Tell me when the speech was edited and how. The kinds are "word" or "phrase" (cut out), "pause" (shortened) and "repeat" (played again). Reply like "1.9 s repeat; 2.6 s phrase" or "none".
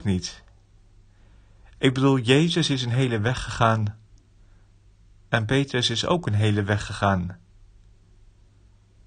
none